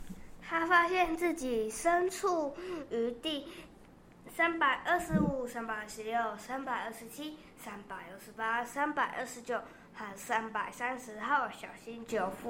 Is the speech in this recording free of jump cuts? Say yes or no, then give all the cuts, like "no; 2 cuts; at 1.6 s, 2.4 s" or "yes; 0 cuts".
yes; 0 cuts